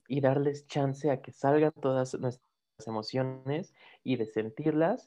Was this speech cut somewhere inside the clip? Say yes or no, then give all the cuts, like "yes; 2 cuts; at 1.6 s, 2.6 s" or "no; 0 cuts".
no; 0 cuts